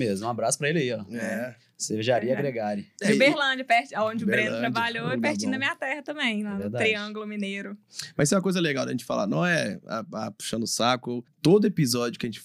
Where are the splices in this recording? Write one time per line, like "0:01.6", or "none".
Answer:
0:11.3